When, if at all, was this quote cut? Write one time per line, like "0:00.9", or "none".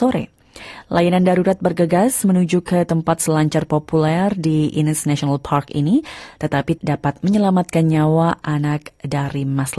0:06.8